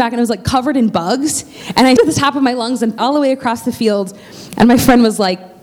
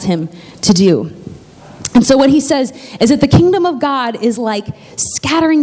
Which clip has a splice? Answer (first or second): first